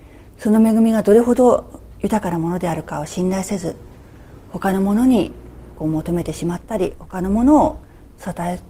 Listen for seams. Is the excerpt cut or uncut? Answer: uncut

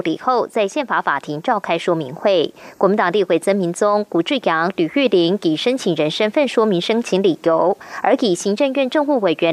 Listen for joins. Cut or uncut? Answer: uncut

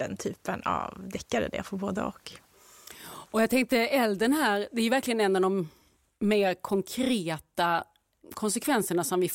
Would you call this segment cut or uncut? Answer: uncut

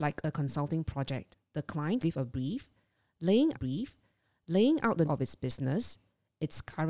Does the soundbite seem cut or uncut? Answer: cut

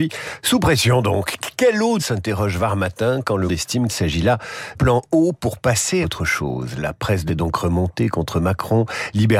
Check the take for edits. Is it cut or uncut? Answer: cut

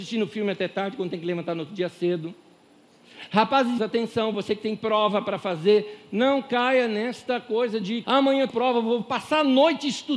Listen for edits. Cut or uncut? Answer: cut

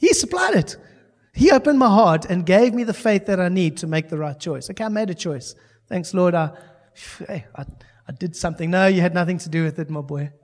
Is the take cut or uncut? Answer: uncut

